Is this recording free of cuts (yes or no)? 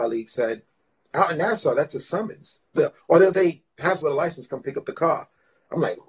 no